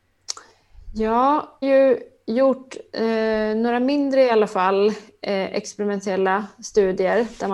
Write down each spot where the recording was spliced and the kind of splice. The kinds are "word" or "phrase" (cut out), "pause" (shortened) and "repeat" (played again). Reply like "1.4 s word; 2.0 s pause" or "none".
1.6 s phrase